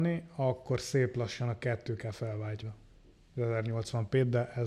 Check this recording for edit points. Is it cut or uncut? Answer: cut